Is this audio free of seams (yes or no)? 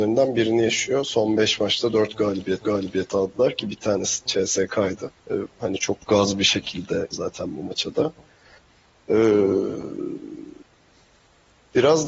no